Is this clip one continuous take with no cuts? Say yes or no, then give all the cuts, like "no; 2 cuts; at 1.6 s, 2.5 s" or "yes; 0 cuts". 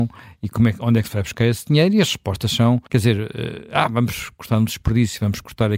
no; 1 cut; at 2.9 s